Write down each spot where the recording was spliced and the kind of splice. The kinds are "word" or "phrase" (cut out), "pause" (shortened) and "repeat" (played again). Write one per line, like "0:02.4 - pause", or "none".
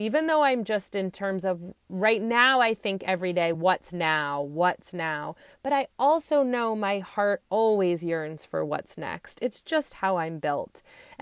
none